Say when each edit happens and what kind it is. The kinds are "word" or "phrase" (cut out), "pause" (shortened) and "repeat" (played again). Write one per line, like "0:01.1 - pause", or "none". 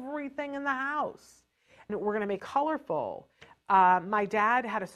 0:01.9 - word
0:02.4 - word